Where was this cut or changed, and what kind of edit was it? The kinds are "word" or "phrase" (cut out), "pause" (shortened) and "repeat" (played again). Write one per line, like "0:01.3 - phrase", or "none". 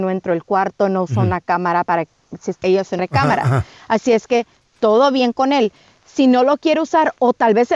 0:01.8 - word
0:02.5 - word
0:03.0 - word